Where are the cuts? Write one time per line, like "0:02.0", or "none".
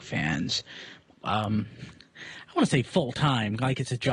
0:01.2